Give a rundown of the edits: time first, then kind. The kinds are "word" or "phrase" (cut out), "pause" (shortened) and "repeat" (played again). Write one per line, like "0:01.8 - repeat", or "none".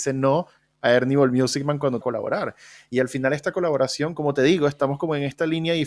0:02.0 - phrase